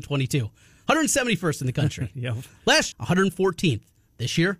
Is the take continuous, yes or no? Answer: no